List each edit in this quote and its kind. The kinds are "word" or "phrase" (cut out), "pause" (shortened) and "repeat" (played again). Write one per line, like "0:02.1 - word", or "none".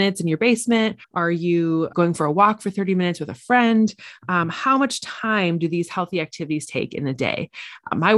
0:01.0 - pause
0:01.9 - word